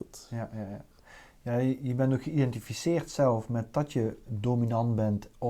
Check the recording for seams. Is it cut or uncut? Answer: uncut